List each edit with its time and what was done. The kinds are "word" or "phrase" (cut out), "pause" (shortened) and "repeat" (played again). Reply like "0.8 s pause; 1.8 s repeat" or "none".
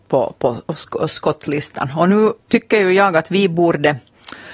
2.4 s pause